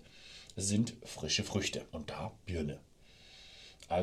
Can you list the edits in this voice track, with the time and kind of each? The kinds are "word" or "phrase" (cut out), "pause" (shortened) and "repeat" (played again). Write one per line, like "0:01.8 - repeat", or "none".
0:01.9 - pause